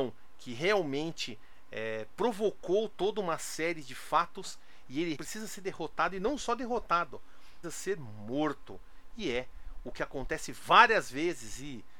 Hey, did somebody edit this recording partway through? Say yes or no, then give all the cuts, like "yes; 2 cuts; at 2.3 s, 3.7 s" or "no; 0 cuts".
yes; 2 cuts; at 5.2 s, 7.6 s